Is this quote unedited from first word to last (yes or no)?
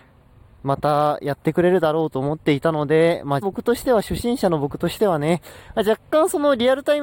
no